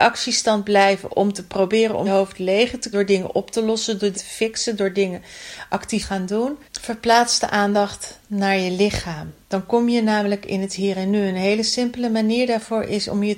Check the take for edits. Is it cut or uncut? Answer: cut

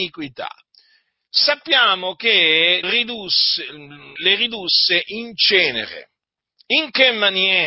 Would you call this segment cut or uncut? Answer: cut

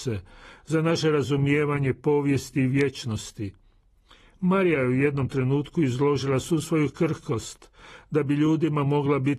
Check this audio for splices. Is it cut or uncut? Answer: uncut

